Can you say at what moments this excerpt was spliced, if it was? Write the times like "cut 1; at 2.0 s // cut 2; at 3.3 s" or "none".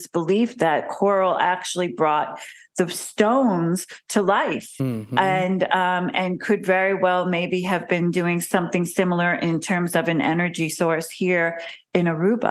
none